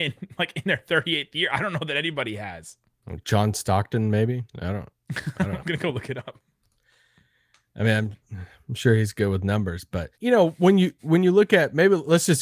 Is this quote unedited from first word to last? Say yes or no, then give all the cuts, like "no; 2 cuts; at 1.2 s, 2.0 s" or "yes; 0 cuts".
no; 3 cuts; at 5.6 s, 8.2 s, 10.1 s